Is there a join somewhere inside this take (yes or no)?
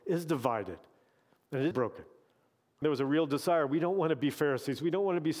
yes